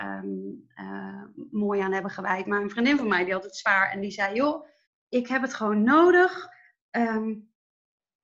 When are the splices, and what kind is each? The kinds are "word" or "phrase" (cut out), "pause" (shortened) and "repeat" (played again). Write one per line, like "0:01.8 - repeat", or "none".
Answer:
0:04.9 - pause